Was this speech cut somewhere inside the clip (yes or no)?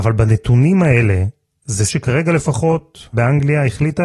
yes